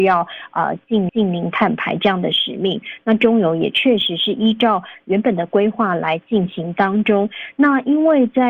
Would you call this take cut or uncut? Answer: cut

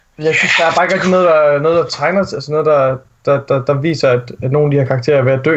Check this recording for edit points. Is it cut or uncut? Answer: uncut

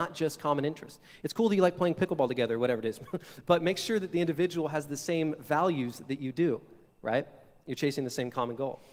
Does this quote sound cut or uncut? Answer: uncut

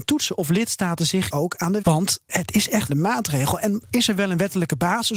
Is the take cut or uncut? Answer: cut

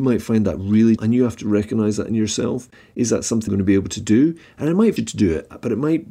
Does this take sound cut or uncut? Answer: cut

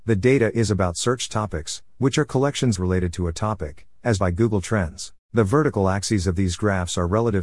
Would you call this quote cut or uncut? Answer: cut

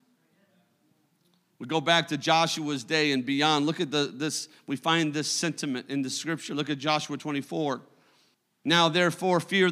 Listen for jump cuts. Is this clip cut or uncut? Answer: cut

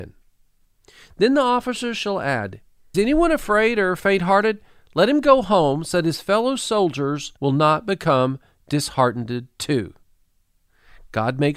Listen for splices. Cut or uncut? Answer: cut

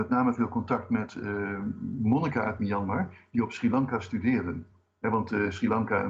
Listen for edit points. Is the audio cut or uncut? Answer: uncut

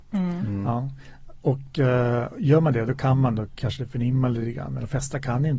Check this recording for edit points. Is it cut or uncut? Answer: uncut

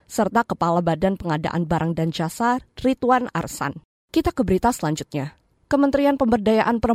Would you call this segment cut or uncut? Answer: uncut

